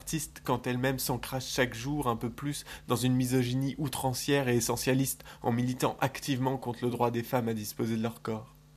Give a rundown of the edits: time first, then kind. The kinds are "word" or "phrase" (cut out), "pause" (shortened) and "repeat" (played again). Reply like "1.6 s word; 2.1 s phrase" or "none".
none